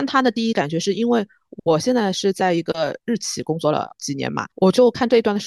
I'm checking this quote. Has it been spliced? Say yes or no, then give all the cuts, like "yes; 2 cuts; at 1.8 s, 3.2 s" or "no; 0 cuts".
yes; 1 cut; at 4.5 s